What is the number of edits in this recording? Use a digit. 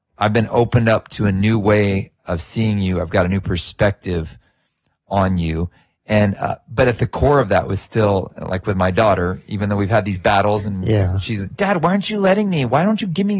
0